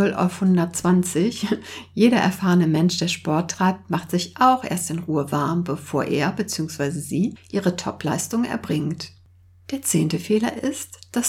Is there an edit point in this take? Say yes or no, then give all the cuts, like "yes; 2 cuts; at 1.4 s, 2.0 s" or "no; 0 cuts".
no; 0 cuts